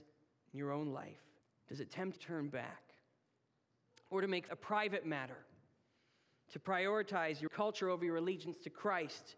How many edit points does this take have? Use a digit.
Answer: 4